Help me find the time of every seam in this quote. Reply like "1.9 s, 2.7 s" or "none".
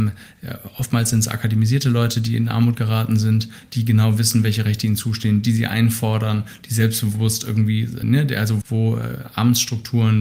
8.0 s, 8.6 s